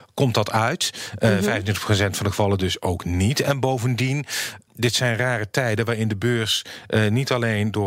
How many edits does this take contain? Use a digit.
1